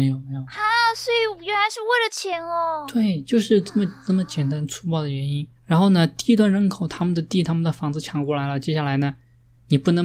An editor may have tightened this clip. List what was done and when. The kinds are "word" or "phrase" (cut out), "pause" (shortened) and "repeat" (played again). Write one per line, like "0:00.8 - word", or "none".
0:05.6 - pause